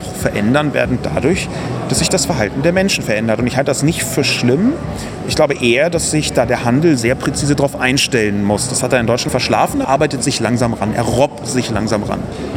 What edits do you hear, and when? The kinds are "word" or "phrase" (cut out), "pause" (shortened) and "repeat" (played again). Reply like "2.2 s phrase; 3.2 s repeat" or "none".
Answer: 9.3 s word; 9.8 s word

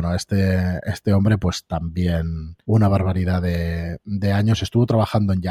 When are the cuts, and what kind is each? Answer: 2.6 s pause

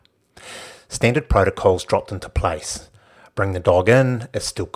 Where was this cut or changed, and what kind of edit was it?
none

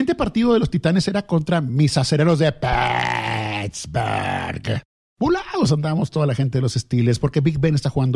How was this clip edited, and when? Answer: none

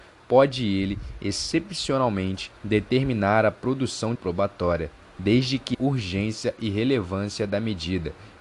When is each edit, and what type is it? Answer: 2.6 s pause; 4.1 s phrase; 5.7 s word

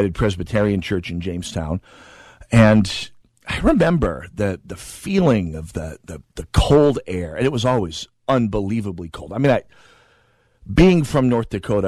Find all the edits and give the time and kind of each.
3.2 s pause

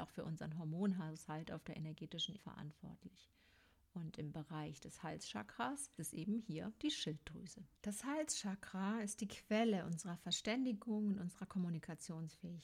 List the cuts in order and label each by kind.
2.4 s word; 6.0 s word; 7.8 s pause

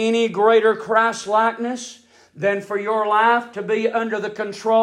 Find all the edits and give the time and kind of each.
none

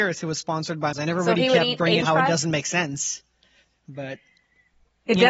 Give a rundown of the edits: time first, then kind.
0.9 s word; 2.0 s word

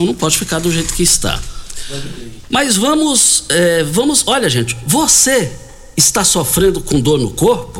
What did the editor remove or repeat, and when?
none

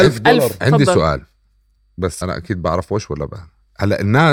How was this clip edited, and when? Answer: 2.2 s word

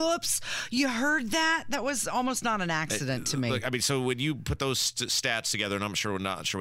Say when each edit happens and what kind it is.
none

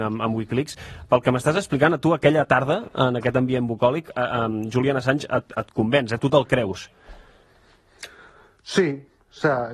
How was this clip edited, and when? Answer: none

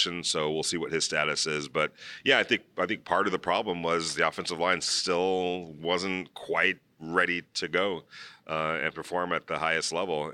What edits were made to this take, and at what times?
none

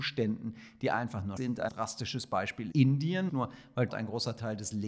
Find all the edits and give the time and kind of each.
1.4 s word; 1.7 s word; 2.7 s word; 3.3 s word; 3.9 s word

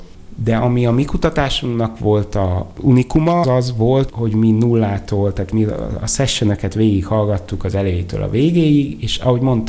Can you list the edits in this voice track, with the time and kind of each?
3.4 s word; 4.1 s word

